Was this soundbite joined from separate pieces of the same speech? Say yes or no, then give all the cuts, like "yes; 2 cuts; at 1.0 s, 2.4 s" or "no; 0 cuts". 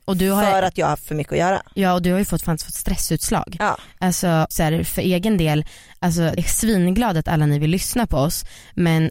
yes; 2 cuts; at 4.5 s, 6.4 s